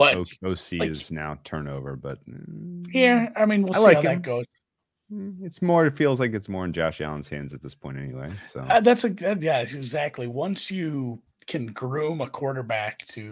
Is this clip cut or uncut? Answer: uncut